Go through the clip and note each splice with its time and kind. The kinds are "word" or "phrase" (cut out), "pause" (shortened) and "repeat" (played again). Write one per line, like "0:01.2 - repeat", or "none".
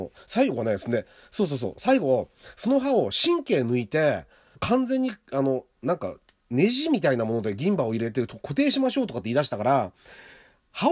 0:04.5 - word